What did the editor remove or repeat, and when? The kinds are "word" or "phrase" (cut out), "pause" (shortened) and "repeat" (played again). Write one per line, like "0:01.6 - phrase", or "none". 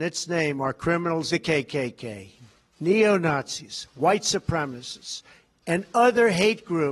0:01.3 - phrase